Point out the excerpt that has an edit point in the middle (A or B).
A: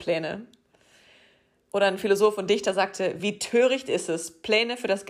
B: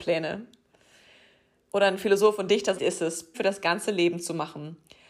B